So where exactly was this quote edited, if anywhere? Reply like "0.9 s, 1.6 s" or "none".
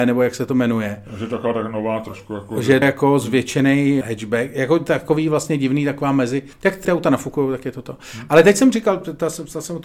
2.8 s, 4.0 s, 6.5 s, 6.8 s